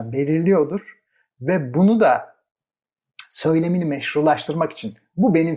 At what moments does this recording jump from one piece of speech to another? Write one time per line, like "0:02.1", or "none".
none